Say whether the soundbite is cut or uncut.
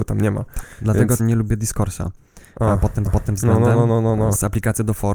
cut